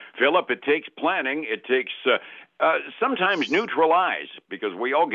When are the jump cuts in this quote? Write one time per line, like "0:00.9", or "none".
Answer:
none

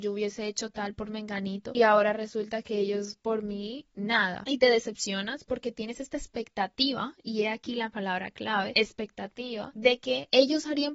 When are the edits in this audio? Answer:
none

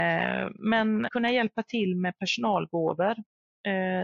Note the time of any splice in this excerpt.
0:01.1

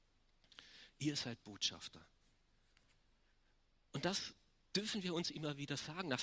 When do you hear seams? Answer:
none

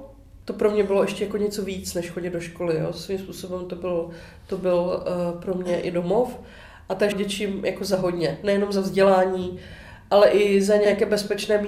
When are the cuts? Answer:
0:07.1

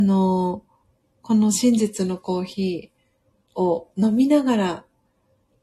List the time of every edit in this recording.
none

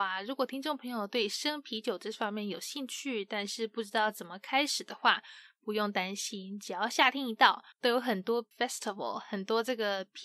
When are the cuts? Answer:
0:07.7
0:08.5

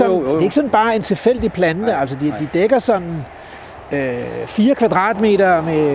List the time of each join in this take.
none

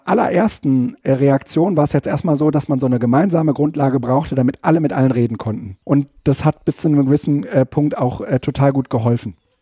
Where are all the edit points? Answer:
0:05.8

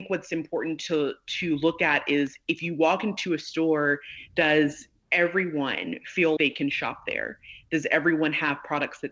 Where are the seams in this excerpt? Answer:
0:04.9
0:06.4

